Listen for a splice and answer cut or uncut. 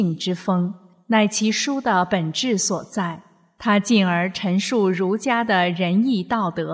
uncut